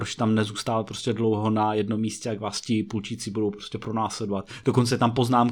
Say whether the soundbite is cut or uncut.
uncut